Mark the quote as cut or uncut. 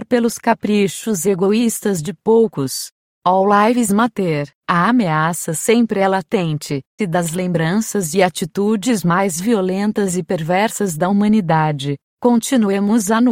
cut